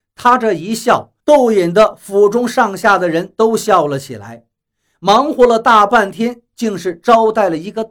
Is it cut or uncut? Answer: cut